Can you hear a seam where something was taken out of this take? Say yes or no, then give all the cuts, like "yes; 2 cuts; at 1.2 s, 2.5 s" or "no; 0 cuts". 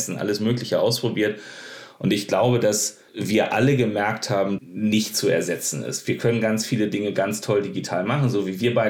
yes; 2 cuts; at 3.1 s, 4.6 s